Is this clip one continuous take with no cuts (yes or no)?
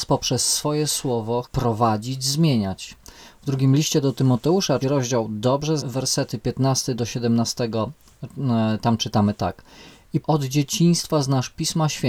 no